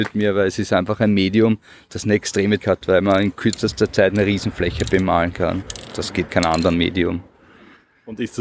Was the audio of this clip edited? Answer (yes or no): yes